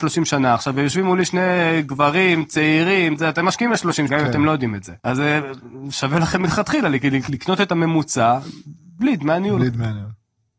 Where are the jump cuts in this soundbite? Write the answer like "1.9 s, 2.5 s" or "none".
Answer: 4.1 s, 5.0 s, 7.3 s